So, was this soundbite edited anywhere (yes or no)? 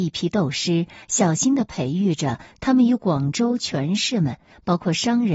no